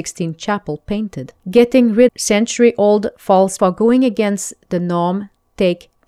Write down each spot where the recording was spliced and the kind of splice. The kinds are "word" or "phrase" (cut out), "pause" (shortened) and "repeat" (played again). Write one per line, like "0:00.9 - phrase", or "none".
0:01.4 - pause
0:02.1 - word
0:03.6 - word

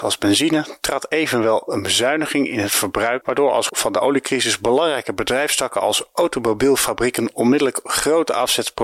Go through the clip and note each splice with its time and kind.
0:03.2 - word
0:03.7 - word

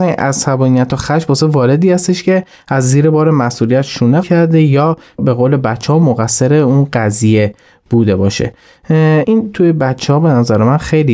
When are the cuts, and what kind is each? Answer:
0:04.2 - word

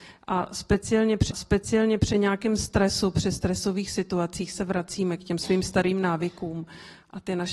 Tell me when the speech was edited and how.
0:01.3 - repeat

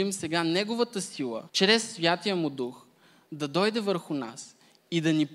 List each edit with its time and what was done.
0:01.5 - pause

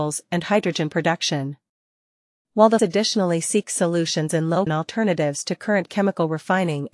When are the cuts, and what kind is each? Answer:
0:02.8 - word
0:04.7 - word

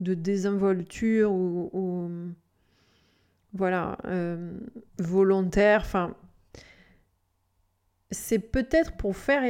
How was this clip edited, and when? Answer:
0:04.9 - pause

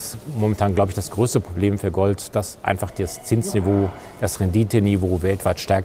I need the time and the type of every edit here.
none

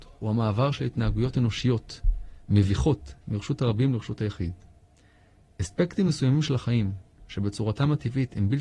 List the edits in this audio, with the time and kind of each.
none

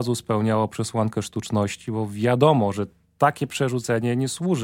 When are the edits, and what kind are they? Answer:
none

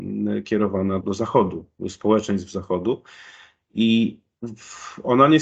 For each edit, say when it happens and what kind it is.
0:01.0 - word

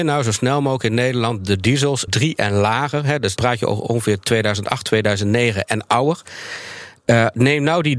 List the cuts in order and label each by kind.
0:02.1 - word
0:03.4 - word

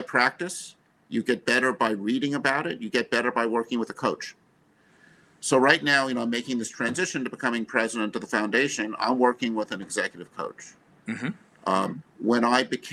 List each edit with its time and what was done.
none

